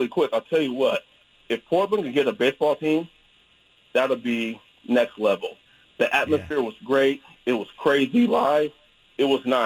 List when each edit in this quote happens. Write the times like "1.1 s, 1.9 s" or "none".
none